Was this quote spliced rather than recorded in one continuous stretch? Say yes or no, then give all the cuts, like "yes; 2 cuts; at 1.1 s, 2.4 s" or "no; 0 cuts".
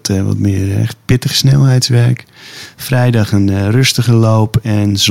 no; 0 cuts